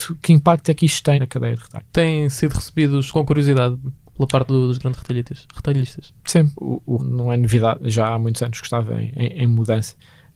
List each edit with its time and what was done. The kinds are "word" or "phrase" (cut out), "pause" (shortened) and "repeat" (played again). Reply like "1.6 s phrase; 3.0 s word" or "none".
1.2 s phrase; 1.9 s pause; 3.1 s word; 6.5 s word; 7.0 s word